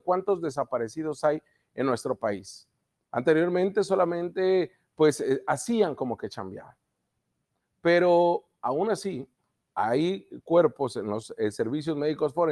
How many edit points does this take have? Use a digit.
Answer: 0